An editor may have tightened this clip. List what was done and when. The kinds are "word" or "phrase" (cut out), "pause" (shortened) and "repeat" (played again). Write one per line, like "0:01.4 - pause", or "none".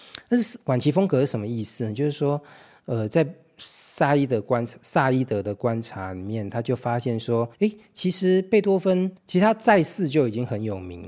0:07.5 - pause
0:09.2 - pause